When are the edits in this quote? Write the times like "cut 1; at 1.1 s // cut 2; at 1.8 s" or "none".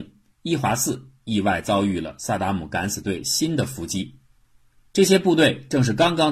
none